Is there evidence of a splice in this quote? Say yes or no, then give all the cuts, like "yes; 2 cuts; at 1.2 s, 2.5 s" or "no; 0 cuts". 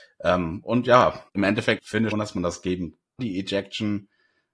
yes; 4 cuts; at 1.3 s, 1.8 s, 2.1 s, 3.2 s